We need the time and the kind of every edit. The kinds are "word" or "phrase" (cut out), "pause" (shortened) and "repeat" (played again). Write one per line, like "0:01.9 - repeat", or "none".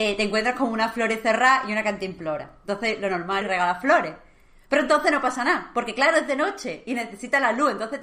0:03.4 - phrase